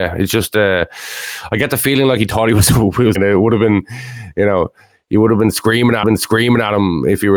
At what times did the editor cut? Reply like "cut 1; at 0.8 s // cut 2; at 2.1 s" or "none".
cut 1; at 3.2 s // cut 2; at 6.0 s